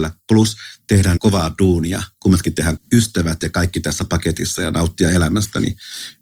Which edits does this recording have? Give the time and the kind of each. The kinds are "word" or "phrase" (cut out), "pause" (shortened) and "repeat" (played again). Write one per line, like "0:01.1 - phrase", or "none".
0:01.2 - word
0:02.8 - phrase